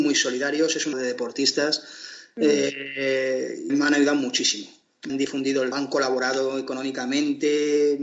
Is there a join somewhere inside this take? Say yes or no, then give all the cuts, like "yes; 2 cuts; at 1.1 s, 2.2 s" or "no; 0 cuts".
yes; 4 cuts; at 0.9 s, 3.7 s, 5.1 s, 5.7 s